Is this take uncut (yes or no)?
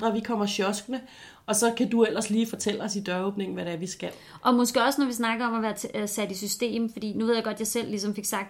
yes